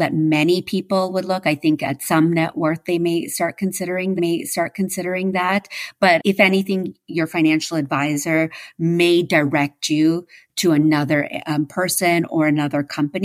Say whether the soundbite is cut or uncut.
cut